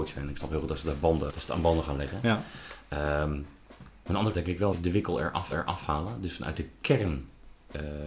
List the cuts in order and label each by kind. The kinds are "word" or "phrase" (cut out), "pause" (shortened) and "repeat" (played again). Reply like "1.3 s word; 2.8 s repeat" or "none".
1.3 s word; 4.3 s word; 4.7 s word; 5.5 s repeat